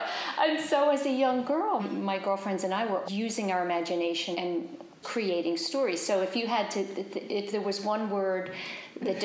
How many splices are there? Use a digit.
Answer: 4